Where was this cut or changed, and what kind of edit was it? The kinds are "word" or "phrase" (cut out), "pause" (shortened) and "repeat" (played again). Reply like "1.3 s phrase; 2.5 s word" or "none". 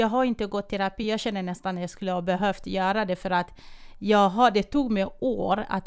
none

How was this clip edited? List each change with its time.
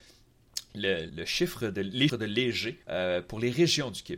1.1 s word; 2.1 s word; 2.8 s pause

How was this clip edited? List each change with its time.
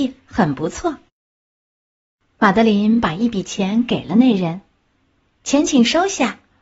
none

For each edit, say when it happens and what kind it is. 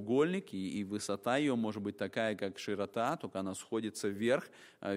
none

